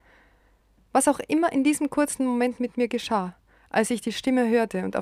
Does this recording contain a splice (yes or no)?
no